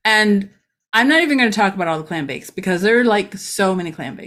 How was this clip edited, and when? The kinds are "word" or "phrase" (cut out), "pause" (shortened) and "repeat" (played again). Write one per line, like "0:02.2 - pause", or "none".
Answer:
none